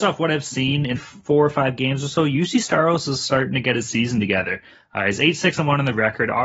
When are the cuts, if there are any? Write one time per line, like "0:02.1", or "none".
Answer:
0:00.9